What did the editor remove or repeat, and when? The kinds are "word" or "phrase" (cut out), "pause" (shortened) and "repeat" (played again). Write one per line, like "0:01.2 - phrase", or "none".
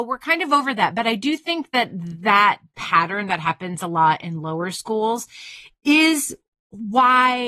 none